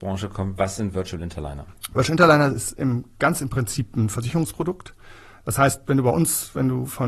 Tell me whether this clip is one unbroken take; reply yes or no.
yes